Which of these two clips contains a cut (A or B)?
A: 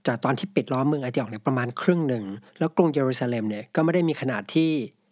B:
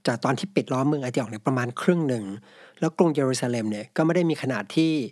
A